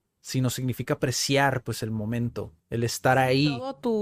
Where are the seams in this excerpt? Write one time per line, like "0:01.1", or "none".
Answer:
0:02.6